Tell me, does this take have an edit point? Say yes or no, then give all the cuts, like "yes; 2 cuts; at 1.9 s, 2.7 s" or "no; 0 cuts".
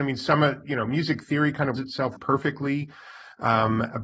yes; 2 cuts; at 1.8 s, 2.2 s